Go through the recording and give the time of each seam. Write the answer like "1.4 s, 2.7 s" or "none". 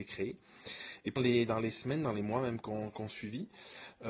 1.2 s